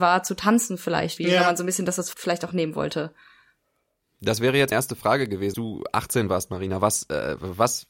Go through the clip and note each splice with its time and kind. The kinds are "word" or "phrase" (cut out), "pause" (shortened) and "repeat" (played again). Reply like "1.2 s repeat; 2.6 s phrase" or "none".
1.2 s word; 2.1 s word; 4.7 s word; 5.5 s word